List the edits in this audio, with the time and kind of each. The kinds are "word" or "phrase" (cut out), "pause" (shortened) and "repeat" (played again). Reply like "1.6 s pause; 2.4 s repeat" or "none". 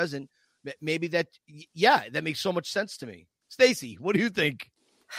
none